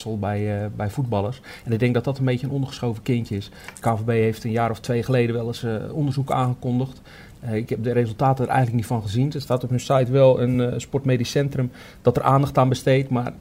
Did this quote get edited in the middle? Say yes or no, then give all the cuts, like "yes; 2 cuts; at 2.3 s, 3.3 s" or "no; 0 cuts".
no; 0 cuts